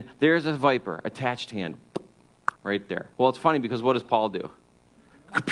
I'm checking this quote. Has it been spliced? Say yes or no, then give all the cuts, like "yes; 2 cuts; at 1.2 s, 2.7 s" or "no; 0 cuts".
yes; 3 cuts; at 1.5 s, 2.5 s, 3.1 s